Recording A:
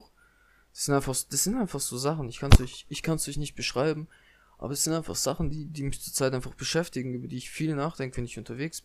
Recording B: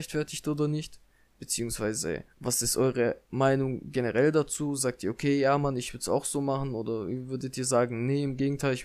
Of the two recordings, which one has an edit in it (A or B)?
B